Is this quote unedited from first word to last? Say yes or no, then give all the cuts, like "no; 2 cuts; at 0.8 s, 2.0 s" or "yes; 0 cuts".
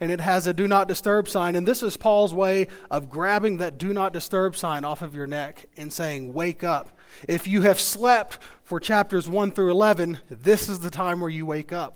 yes; 0 cuts